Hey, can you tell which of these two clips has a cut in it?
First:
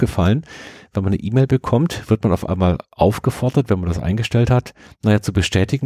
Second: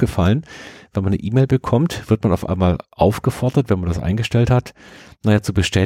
first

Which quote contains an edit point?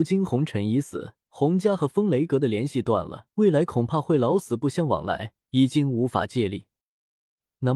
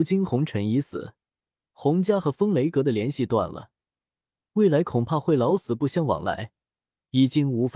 first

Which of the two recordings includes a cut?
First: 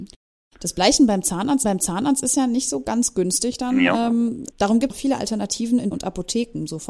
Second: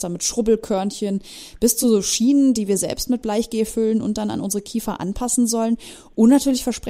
first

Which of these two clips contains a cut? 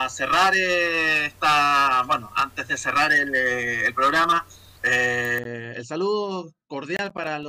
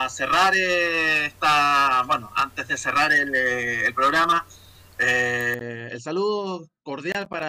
first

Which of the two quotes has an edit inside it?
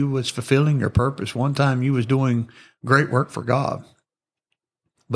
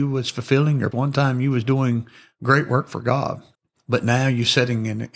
second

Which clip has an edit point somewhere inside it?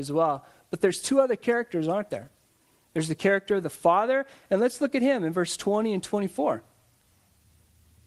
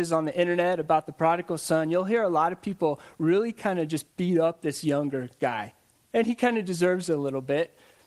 second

